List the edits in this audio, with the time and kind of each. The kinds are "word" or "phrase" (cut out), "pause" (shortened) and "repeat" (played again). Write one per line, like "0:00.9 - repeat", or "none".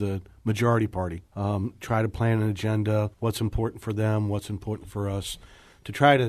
0:01.3 - pause
0:03.1 - pause